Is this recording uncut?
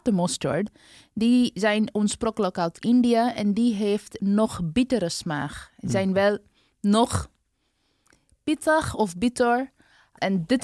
yes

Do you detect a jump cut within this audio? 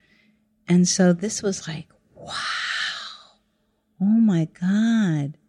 no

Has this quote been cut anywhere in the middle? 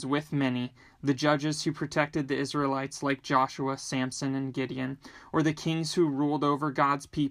no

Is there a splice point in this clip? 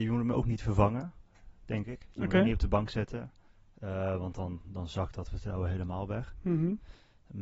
no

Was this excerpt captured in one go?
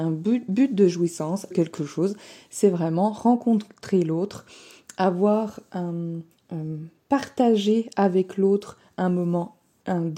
no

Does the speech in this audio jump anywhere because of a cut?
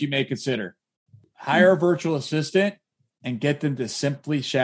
no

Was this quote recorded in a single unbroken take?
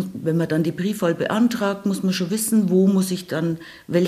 yes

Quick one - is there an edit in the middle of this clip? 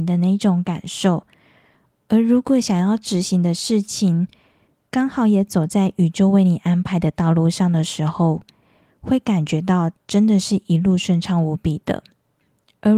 no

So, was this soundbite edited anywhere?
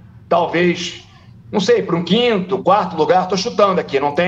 no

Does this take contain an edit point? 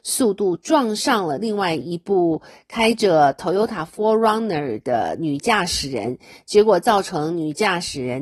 no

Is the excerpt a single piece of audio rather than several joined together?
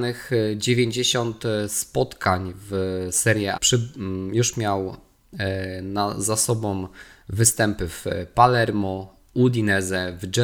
no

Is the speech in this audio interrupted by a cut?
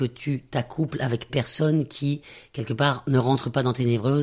yes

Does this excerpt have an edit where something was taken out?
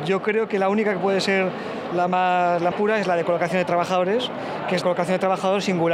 yes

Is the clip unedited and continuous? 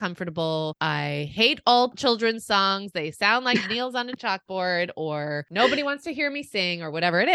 yes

